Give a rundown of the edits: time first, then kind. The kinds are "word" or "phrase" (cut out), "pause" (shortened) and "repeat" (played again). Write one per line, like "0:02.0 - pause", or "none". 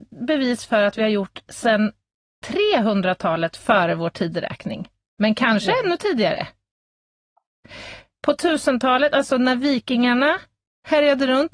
none